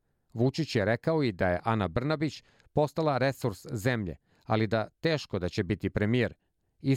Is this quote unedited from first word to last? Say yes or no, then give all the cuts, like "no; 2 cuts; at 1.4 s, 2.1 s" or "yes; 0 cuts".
yes; 0 cuts